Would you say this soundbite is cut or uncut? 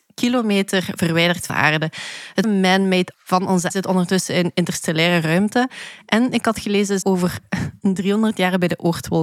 cut